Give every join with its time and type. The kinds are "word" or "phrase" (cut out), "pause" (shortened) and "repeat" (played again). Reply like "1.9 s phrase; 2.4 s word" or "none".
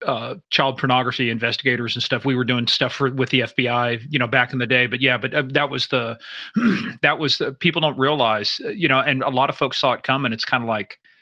none

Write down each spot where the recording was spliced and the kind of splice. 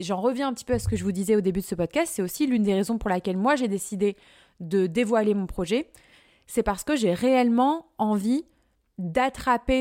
none

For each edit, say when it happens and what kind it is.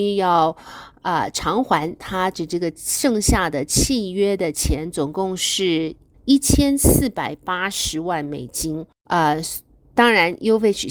none

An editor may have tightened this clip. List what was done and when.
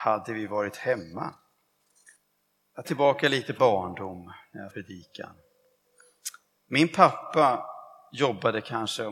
2.8 s word; 3.6 s word; 4.7 s word

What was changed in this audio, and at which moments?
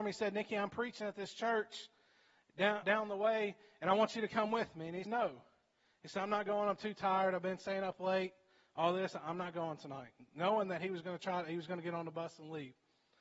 2.8 s word; 5.0 s word

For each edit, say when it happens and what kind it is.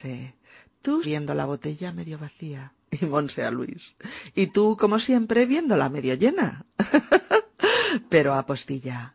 1.0 s word; 2.8 s pause

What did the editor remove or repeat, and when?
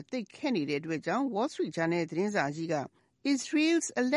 none

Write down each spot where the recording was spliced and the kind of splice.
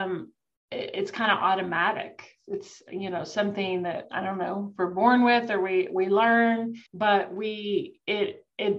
6.9 s pause

